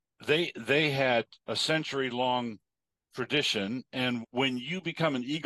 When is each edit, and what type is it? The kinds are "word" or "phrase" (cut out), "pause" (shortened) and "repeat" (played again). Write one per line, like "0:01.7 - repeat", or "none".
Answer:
0:01.4 - pause
0:04.2 - word